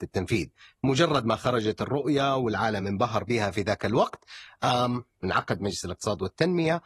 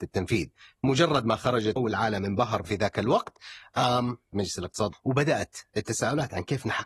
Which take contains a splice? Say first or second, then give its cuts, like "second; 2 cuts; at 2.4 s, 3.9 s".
second; 4 cuts; at 1.8 s, 2.6 s, 4.3 s, 4.9 s